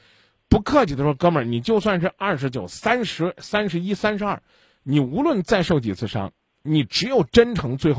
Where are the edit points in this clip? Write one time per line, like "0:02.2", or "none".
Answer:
none